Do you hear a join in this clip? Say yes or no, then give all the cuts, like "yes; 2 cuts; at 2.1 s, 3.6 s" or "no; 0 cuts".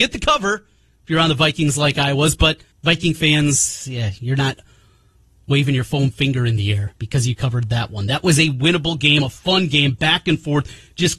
yes; 2 cuts; at 2.7 s, 7.0 s